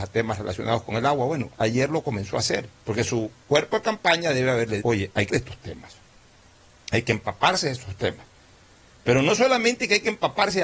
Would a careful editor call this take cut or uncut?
cut